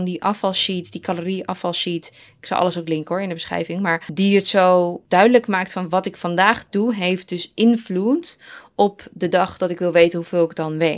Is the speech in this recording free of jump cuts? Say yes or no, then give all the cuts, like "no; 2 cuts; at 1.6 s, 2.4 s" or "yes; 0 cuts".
yes; 0 cuts